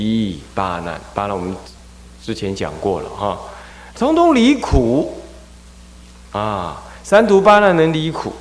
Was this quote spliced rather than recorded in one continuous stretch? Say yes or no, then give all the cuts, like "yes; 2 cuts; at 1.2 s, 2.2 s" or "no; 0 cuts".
no; 0 cuts